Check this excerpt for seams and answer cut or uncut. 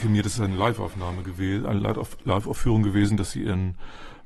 uncut